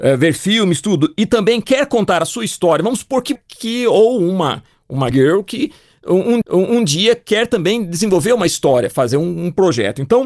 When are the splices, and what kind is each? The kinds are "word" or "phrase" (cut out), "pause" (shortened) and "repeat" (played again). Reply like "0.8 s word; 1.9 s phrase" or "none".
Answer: 3.4 s phrase; 5.1 s word; 6.4 s repeat